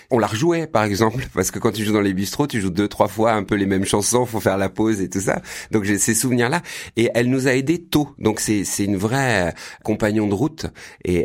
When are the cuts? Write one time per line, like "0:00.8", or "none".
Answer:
none